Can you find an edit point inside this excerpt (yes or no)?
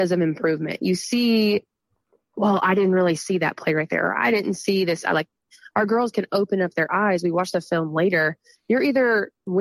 no